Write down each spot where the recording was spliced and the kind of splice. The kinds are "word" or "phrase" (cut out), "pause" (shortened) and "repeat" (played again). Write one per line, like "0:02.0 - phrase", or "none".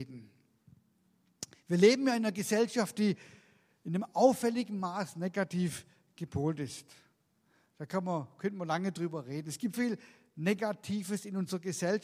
0:09.7 - word